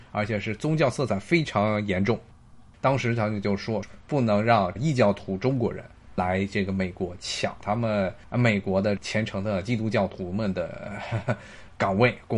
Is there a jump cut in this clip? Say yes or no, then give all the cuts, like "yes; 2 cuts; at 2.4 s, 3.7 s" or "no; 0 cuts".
no; 0 cuts